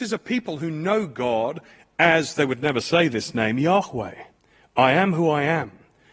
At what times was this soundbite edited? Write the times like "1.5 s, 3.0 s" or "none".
none

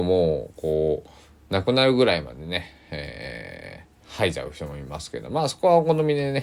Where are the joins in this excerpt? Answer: 4.0 s

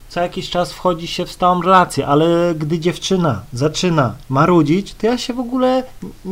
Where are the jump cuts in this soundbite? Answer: 4.2 s

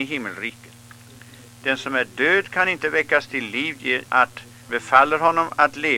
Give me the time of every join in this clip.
4.1 s, 4.7 s

